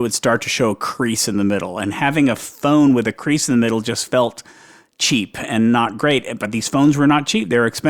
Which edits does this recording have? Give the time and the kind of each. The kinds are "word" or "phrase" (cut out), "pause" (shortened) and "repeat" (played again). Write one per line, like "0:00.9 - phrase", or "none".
none